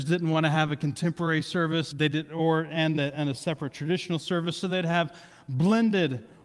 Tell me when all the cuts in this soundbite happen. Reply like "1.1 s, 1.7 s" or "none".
1.9 s